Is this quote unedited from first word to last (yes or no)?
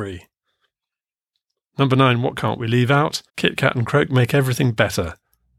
no